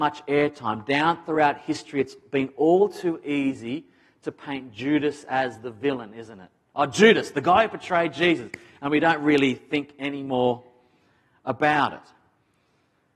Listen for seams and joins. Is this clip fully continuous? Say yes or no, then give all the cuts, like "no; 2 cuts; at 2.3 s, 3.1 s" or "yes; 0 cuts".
yes; 0 cuts